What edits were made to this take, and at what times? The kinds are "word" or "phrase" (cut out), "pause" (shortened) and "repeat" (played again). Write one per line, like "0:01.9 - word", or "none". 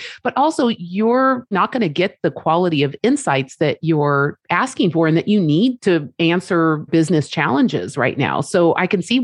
0:01.5 - word
0:06.9 - word